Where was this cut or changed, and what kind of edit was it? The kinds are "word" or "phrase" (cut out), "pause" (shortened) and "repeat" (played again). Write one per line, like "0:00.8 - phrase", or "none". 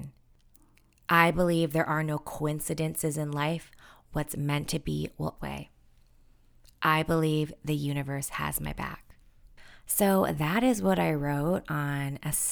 0:05.4 - phrase